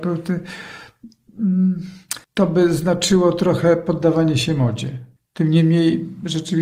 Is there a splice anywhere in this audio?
yes; 2 cuts; at 2.2 s, 5.2 s

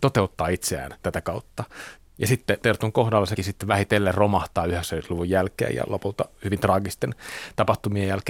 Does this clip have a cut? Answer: yes; 2 cuts; at 2.6 s, 3.4 s

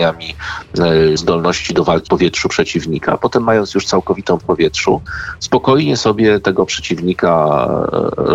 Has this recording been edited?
yes; 3 cuts; at 1.2 s, 2.1 s, 4.4 s

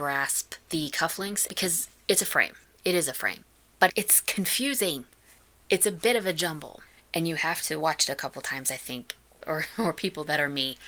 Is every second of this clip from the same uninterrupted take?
no; 2 cuts; at 1.5 s, 3.9 s

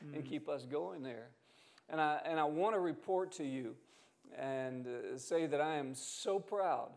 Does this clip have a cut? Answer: no; 0 cuts

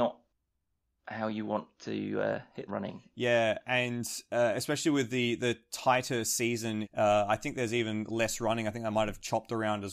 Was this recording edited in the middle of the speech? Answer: yes; 2 cuts; at 2.7 s, 6.8 s

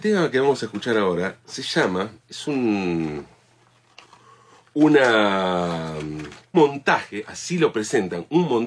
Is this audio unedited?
no; 2 cuts; at 2.2 s, 6.5 s

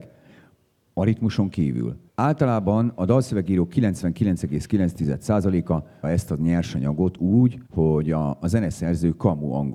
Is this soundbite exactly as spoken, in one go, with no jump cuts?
no; 3 cuts; at 2.1 s, 6.0 s, 7.7 s

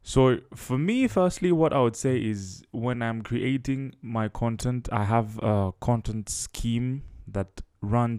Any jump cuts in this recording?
no; 0 cuts

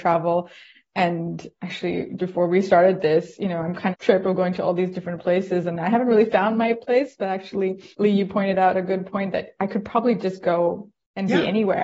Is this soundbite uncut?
no; 3 cuts; at 2.2 s, 3.9 s, 7.9 s

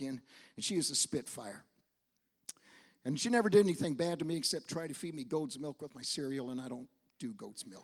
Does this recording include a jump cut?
no; 0 cuts

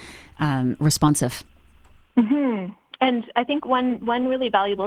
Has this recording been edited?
no; 0 cuts

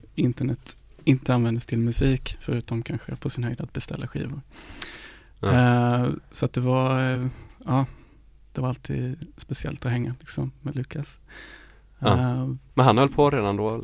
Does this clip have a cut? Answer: no; 0 cuts

